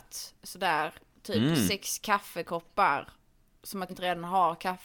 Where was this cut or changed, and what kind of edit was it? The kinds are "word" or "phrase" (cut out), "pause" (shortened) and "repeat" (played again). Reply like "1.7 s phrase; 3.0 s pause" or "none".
3.9 s word